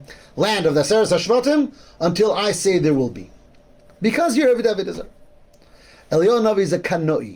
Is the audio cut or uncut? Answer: uncut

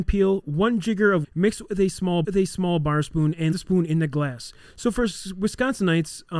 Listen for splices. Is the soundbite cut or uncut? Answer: cut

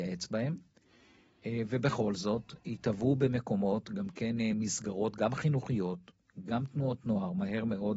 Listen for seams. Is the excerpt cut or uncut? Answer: uncut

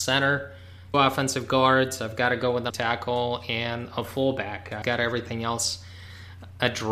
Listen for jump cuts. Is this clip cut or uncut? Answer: cut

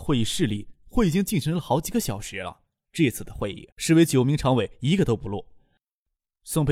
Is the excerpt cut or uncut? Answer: cut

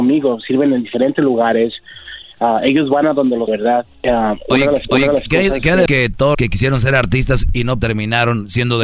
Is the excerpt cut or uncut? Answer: cut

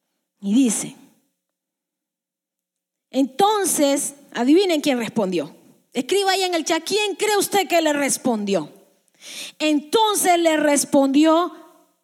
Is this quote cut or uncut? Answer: uncut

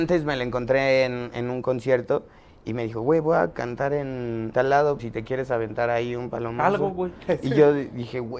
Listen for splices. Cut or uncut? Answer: cut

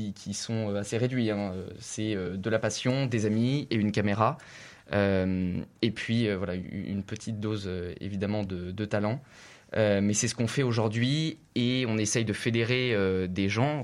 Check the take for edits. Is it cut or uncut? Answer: uncut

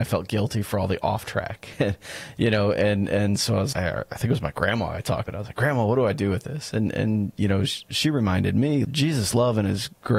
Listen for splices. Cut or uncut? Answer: cut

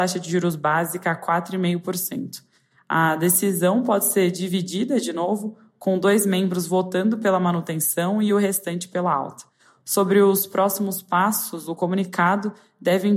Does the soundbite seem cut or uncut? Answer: uncut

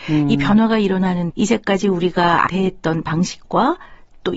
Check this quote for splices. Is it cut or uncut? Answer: cut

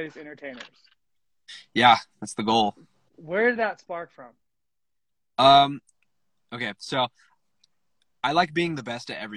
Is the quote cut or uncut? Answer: uncut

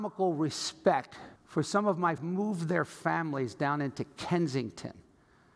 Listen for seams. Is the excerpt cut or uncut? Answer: cut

